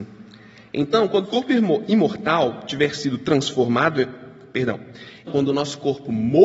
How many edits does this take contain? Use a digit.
2